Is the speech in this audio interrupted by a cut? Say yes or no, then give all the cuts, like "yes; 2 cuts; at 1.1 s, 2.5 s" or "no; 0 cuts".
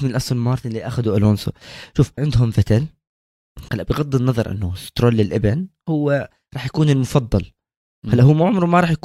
yes; 2 cuts; at 2.2 s, 3.7 s